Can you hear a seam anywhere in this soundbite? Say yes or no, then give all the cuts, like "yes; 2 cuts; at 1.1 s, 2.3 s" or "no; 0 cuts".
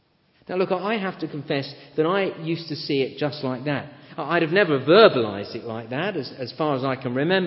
no; 0 cuts